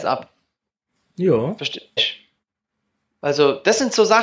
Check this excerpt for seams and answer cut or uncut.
cut